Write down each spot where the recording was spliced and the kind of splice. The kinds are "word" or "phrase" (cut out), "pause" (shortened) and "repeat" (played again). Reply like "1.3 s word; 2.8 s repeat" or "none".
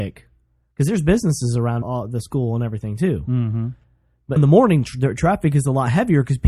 1.8 s word; 4.4 s word